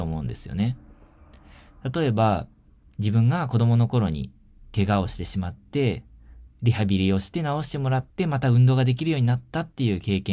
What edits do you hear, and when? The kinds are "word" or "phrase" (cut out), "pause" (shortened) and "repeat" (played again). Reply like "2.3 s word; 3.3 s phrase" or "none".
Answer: 6.5 s word; 8.1 s pause